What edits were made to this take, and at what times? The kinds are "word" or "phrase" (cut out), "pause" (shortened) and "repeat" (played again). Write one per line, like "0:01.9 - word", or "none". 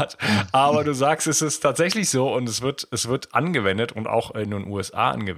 none